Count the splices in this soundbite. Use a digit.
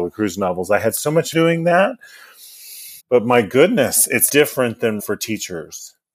4